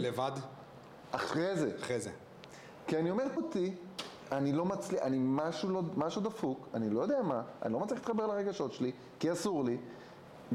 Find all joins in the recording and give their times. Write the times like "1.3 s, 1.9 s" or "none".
3.4 s